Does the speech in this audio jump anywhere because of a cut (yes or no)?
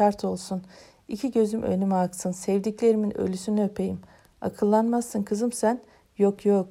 no